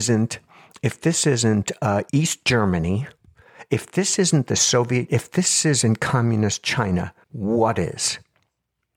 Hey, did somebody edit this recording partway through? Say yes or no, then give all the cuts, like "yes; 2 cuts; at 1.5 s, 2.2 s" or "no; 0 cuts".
yes; 3 cuts; at 2.1 s, 5.1 s, 7.2 s